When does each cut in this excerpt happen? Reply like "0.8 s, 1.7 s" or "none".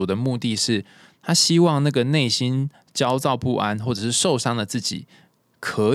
none